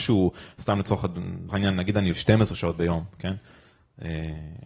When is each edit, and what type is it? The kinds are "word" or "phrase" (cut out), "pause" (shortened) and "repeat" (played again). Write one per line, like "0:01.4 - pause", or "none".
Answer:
0:01.5 - word
0:02.1 - word